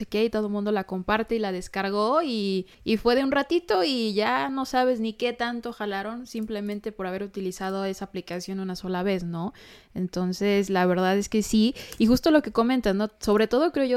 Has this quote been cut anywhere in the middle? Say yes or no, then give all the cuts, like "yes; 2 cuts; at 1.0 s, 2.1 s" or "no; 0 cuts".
yes; 1 cut; at 2.7 s